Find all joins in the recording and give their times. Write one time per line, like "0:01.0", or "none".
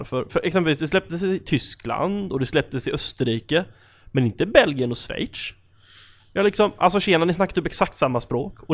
none